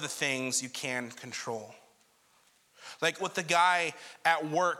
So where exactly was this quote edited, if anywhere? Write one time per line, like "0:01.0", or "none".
0:03.2